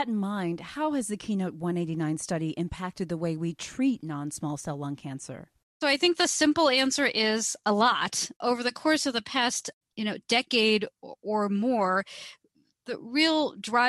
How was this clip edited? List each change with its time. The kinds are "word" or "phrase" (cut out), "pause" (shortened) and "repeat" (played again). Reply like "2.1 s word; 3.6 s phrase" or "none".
none